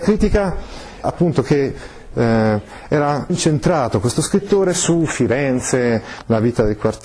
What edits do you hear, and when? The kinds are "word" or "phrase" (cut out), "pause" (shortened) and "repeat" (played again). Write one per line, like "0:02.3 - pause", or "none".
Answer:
0:01.0 - word
0:03.3 - word